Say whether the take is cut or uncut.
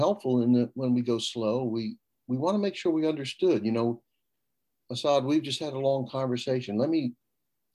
uncut